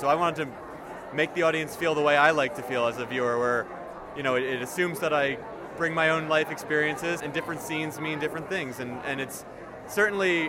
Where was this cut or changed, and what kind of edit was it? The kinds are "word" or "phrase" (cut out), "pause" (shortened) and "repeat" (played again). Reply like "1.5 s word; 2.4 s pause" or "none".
7.2 s word